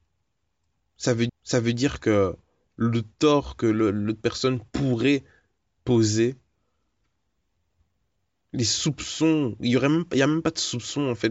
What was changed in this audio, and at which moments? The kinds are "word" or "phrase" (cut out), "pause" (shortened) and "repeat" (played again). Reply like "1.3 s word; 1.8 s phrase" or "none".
1.3 s repeat